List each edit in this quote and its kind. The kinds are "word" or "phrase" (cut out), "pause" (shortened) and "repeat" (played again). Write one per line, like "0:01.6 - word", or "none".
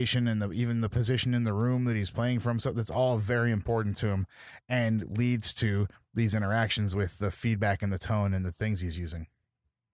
none